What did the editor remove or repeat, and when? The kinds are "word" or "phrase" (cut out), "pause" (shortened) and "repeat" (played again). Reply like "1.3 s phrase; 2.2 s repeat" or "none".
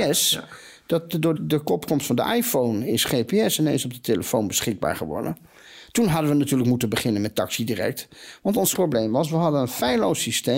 1.4 s word; 8.7 s word